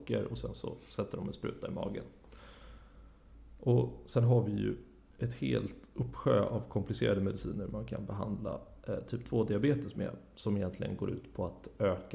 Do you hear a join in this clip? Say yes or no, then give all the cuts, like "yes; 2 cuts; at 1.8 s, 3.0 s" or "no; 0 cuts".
no; 0 cuts